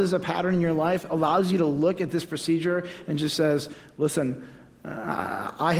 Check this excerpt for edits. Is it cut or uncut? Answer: uncut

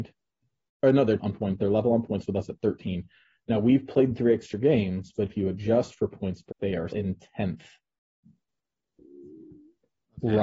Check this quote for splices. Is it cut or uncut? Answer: cut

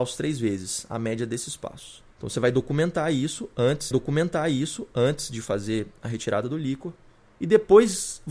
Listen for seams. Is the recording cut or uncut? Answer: cut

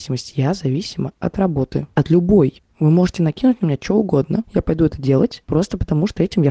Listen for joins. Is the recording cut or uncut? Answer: uncut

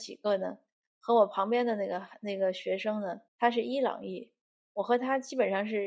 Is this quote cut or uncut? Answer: cut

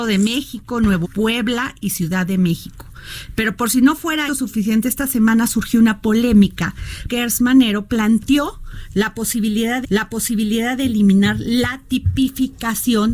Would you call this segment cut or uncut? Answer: cut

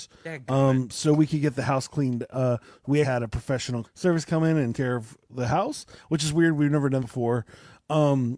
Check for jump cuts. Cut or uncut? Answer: cut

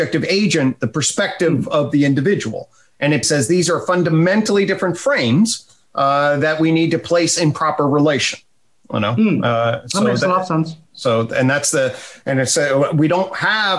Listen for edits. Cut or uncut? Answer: cut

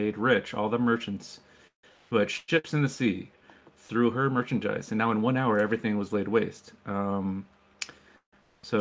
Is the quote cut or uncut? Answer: uncut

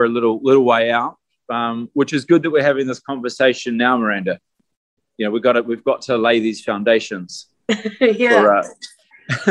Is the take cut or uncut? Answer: uncut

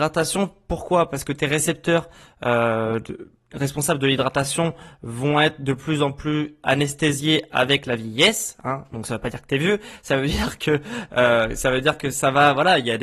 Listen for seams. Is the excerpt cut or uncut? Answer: uncut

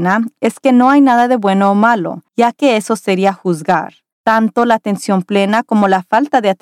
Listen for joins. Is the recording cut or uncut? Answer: cut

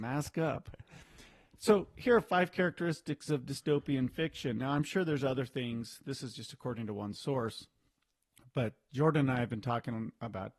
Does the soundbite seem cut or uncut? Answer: uncut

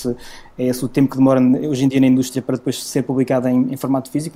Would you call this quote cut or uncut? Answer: uncut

